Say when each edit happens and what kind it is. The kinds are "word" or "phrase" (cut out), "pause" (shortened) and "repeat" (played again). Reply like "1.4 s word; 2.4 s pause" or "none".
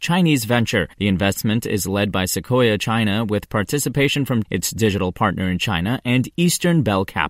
0.9 s pause; 4.4 s word